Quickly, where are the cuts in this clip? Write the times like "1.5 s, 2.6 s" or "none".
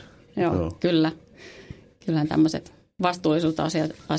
none